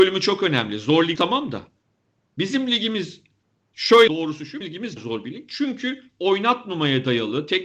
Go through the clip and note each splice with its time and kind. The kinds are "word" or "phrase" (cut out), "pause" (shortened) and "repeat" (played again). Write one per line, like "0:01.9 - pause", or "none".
0:01.2 - word
0:04.1 - word
0:04.6 - word
0:05.0 - word